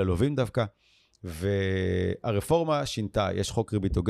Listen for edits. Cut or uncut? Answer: uncut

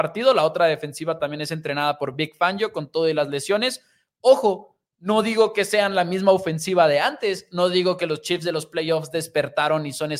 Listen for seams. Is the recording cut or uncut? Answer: uncut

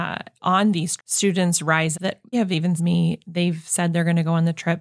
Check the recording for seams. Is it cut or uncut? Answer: cut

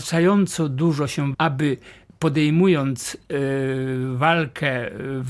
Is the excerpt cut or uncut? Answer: cut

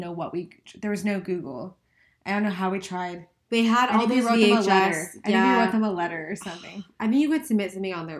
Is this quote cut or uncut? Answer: uncut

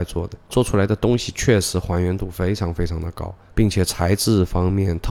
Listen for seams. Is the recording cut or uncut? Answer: uncut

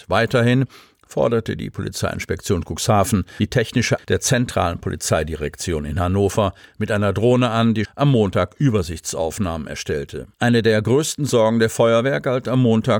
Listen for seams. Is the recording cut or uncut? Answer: cut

